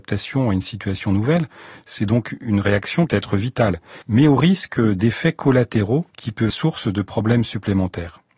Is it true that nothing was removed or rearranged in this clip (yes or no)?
no